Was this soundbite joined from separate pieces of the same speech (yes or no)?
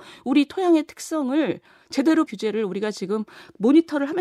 yes